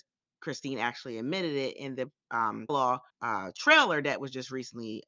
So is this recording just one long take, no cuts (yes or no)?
no